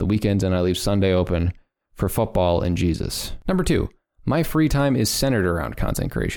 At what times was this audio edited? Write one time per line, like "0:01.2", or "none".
none